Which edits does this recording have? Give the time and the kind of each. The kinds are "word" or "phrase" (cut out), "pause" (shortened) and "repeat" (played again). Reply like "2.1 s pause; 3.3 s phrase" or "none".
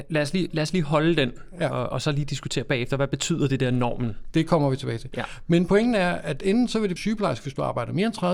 7.0 s phrase